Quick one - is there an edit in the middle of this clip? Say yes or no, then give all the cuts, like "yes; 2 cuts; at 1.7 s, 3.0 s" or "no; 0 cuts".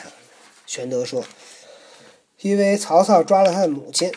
yes; 1 cut; at 1.6 s